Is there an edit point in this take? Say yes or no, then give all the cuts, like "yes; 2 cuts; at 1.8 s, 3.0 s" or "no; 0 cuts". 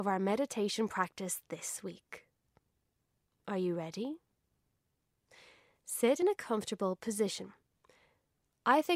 no; 0 cuts